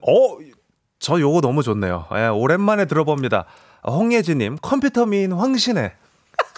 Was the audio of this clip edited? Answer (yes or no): no